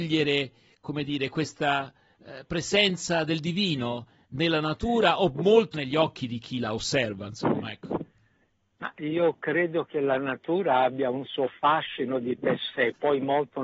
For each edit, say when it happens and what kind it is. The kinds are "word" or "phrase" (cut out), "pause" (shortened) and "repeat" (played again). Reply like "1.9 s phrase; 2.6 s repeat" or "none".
5.7 s word